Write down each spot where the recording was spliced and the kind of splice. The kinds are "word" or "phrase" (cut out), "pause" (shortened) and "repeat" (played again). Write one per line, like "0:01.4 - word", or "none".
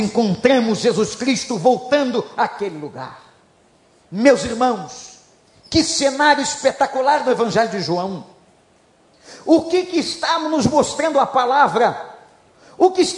none